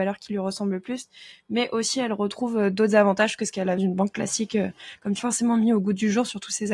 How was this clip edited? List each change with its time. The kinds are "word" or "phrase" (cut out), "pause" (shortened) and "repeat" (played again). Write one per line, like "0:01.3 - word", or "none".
0:03.8 - word
0:05.2 - phrase